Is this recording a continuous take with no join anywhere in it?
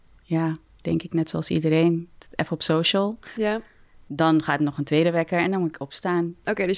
yes; 0 cuts

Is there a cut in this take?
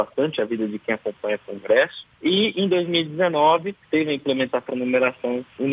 yes; 1 cut; at 4.7 s

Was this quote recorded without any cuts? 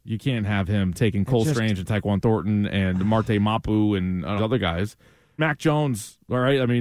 no; 2 cuts; at 4.4 s, 5.4 s

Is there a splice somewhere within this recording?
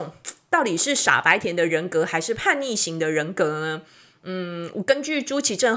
no; 0 cuts

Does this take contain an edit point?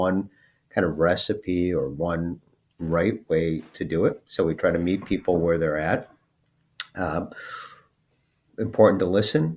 no; 0 cuts

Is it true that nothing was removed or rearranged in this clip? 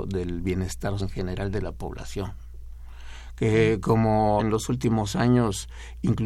no; 2 cuts; at 1.0 s, 4.4 s

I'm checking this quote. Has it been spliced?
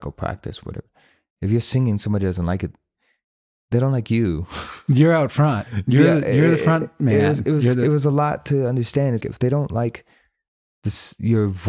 yes; 1 cut; at 9.2 s

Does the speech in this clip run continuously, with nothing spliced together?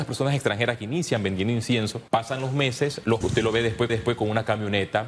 no; 3 cuts; at 2.1 s, 3.2 s, 3.9 s

